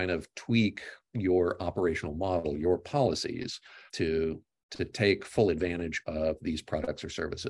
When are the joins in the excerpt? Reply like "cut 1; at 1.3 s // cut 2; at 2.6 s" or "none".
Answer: cut 1; at 3.9 s